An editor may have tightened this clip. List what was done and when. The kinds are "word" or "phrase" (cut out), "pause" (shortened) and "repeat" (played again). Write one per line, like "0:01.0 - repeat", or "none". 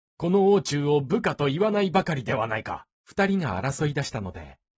0:02.9 - pause